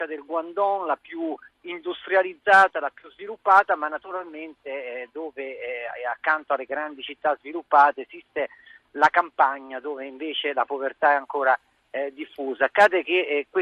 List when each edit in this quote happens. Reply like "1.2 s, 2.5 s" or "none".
none